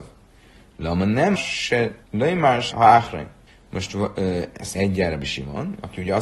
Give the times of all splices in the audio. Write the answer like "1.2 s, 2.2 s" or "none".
1.4 s, 2.0 s, 2.7 s, 3.5 s, 4.7 s